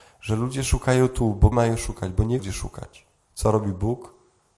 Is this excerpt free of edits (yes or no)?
no